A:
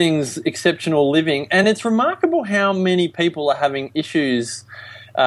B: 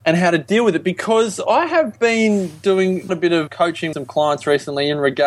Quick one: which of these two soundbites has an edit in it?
B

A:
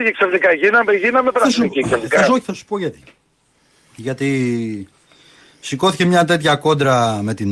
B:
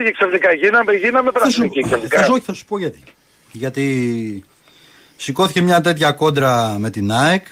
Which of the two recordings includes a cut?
B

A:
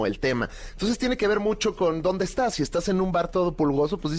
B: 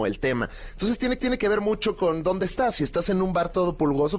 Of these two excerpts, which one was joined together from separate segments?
B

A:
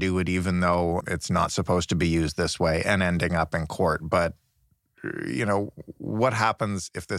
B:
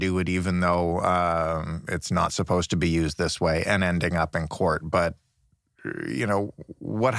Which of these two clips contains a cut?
A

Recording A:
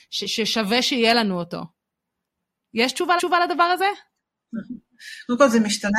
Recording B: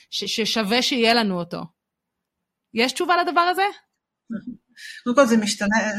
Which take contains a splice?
A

